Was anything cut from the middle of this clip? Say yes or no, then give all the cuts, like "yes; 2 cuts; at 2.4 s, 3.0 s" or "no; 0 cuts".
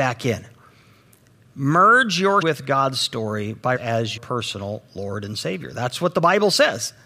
yes; 3 cuts; at 2.4 s, 3.8 s, 4.2 s